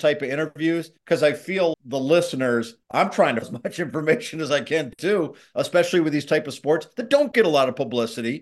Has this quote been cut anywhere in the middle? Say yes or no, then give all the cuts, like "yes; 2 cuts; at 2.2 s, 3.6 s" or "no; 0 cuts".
yes; 4 cuts; at 1.0 s, 1.7 s, 2.8 s, 3.4 s